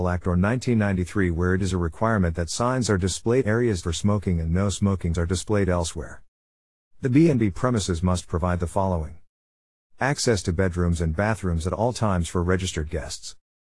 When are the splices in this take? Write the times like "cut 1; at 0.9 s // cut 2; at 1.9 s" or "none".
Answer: cut 1; at 3.4 s // cut 2; at 3.8 s // cut 3; at 5.1 s

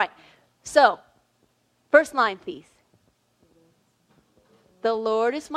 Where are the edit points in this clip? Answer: none

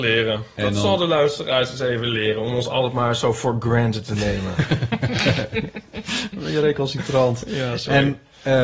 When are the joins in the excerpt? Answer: none

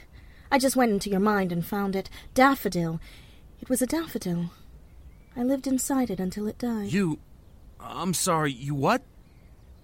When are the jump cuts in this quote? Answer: none

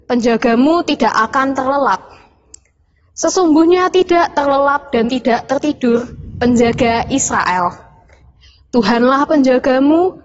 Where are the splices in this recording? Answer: none

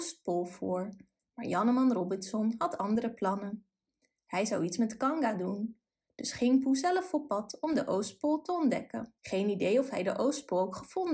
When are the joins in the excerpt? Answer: cut 1; at 9.2 s

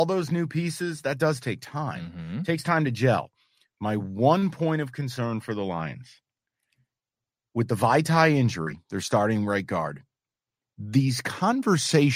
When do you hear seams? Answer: none

